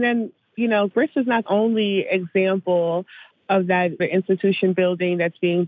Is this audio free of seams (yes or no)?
no